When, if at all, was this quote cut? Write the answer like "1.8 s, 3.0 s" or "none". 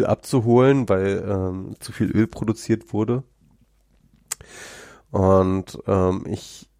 none